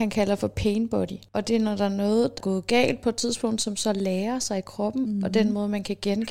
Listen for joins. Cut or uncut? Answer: cut